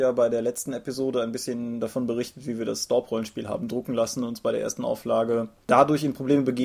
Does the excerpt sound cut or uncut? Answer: uncut